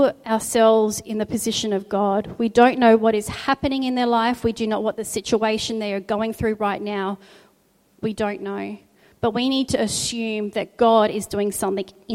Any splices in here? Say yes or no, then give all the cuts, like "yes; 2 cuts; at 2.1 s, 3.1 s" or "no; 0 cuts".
no; 0 cuts